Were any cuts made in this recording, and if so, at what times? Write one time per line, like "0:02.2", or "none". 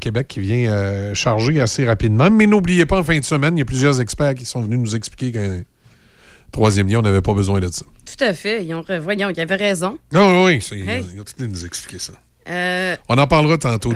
none